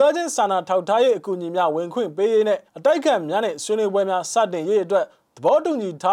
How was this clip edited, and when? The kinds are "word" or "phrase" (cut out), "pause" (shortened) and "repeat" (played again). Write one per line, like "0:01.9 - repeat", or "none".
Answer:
0:02.7 - pause